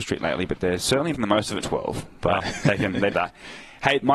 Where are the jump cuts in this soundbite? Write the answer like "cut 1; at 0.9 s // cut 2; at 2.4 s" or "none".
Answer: cut 1; at 1.1 s // cut 2; at 1.6 s // cut 3; at 2.4 s // cut 4; at 3.1 s

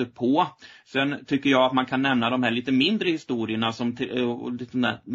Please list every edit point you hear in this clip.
none

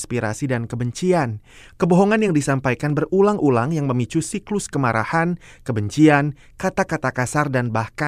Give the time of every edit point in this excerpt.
none

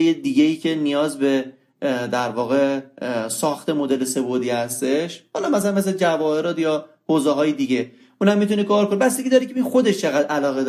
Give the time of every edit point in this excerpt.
none

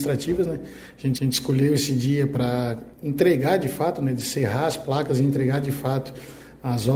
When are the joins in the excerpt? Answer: cut 1; at 1.1 s // cut 2; at 2.9 s

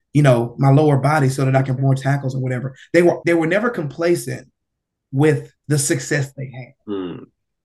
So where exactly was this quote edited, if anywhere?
cut 1; at 1.8 s // cut 2; at 3.2 s // cut 3; at 5.6 s

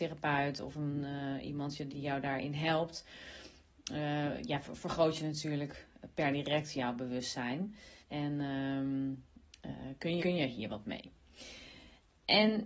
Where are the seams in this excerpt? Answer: cut 1; at 1.9 s // cut 2; at 8.0 s // cut 3; at 10.2 s

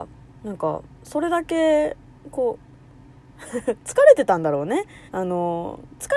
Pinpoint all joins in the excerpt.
cut 1; at 0.9 s // cut 2; at 5.1 s

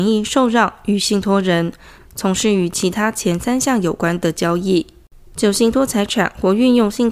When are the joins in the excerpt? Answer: cut 1; at 2.0 s // cut 2; at 5.3 s

